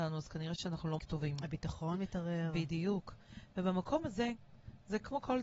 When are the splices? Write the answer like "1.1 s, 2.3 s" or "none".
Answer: 1.0 s